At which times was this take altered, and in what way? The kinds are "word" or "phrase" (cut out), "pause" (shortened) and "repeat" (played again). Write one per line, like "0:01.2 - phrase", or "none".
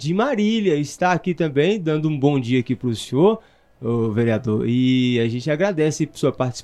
none